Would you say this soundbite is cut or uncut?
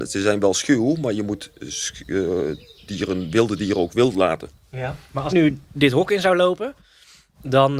cut